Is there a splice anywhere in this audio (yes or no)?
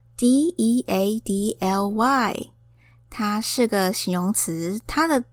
no